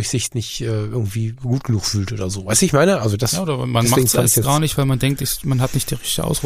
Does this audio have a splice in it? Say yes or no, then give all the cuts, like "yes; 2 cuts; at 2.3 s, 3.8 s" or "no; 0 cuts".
no; 0 cuts